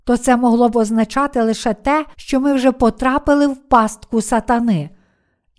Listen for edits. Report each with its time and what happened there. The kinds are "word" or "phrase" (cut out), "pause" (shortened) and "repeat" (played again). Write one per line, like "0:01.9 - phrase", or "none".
0:02.1 - pause